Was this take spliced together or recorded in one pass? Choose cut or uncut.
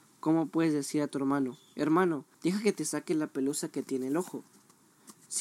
cut